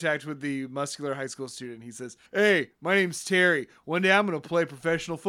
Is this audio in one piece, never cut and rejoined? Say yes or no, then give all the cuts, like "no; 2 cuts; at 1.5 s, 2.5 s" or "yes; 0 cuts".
no; 1 cut; at 2.3 s